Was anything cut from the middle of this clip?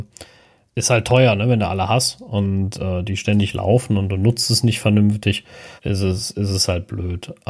yes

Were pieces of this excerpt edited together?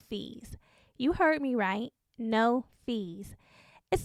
no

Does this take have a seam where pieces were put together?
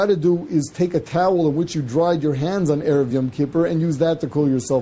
no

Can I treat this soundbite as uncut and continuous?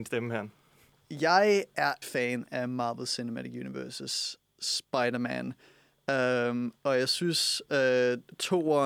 no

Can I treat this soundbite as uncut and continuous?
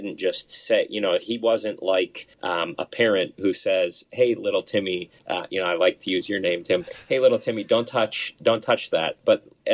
no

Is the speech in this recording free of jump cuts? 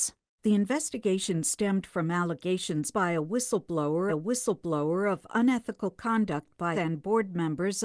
no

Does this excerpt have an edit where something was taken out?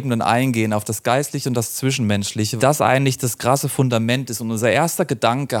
yes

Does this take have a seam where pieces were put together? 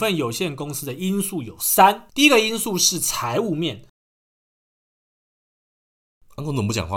no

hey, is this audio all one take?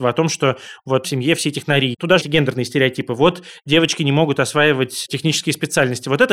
no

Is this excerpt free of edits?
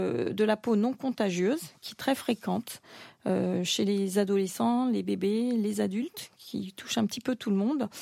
yes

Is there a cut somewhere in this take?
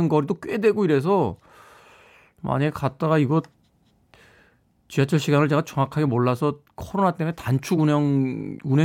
no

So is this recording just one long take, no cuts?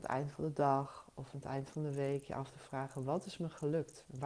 yes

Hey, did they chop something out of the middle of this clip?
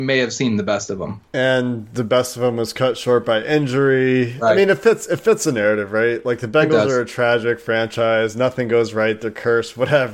yes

